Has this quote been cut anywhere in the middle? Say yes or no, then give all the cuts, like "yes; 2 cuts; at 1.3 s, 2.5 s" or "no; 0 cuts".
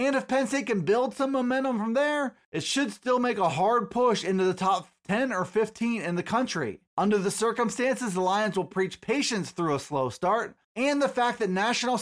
yes; 3 cuts; at 2.4 s, 6.9 s, 10.6 s